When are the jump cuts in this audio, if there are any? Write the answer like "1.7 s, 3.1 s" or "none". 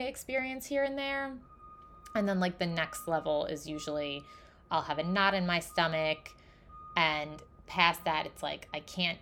none